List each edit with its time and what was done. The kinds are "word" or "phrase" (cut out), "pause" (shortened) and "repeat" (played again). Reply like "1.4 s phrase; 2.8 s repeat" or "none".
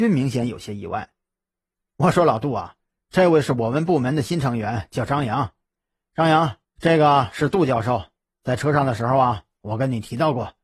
2.9 s pause; 6.6 s pause